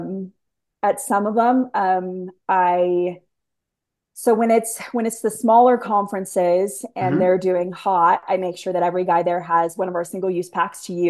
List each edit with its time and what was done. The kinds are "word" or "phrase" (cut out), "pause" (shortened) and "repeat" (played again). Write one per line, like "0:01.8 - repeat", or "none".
none